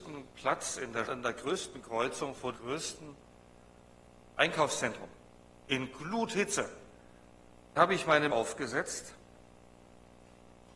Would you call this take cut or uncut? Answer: cut